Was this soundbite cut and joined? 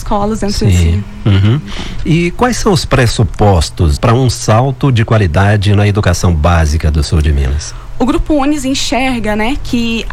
yes; 1 cut; at 4.0 s

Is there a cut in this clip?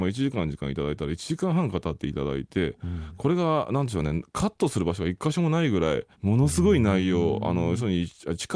yes; 1 cut; at 6.1 s

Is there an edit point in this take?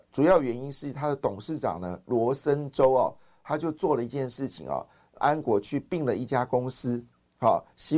yes; 1 cut; at 5.2 s

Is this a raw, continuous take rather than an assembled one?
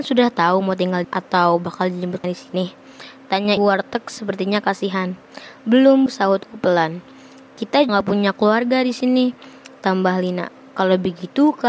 no; 5 cuts; at 1.0 s, 2.2 s, 3.6 s, 6.1 s, 7.9 s

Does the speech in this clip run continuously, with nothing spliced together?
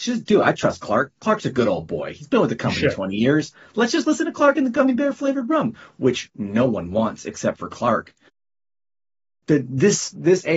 yes; 0 cuts

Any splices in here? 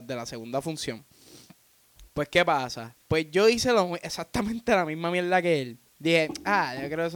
yes; 2 cuts; at 2.1 s, 3.0 s

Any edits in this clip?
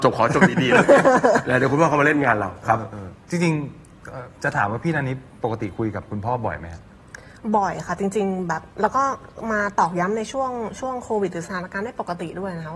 yes; 1 cut; at 8.7 s

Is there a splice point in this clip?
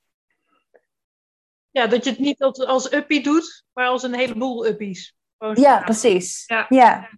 no; 0 cuts

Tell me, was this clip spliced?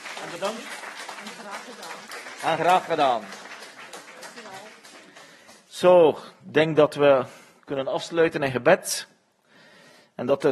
no; 0 cuts

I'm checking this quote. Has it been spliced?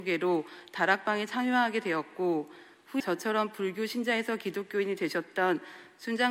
yes; 1 cut; at 3.0 s

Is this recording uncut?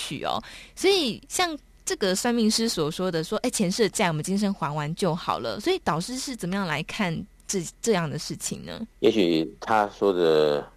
no; 1 cut; at 8.9 s

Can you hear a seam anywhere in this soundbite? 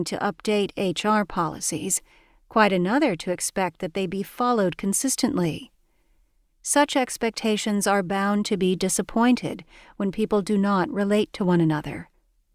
no; 0 cuts

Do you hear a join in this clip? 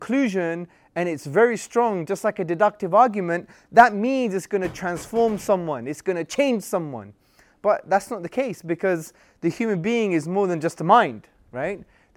no; 0 cuts

